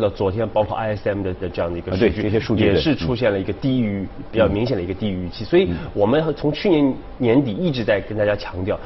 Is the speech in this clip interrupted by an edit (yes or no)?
yes